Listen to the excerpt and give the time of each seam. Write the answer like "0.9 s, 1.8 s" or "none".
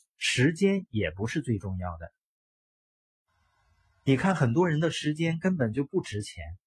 none